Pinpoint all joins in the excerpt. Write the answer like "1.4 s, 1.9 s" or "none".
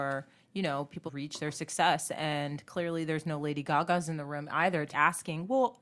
1.1 s, 4.9 s